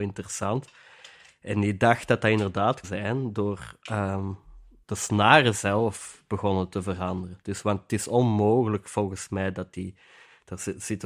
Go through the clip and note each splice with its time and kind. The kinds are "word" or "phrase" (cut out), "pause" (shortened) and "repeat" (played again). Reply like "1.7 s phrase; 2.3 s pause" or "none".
2.8 s word; 4.8 s word